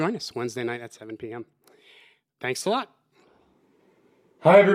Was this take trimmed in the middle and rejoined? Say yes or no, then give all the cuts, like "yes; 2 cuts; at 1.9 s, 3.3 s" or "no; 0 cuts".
no; 0 cuts